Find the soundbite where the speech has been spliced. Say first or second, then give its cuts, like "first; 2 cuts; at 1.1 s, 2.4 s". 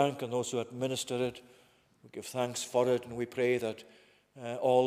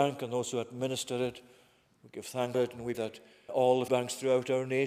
second; 4 cuts; at 2.5 s, 2.9 s, 3.5 s, 3.9 s